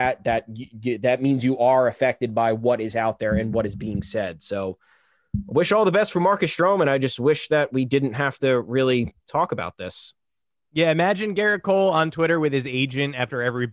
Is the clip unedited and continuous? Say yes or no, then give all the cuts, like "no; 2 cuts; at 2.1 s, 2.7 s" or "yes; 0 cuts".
yes; 0 cuts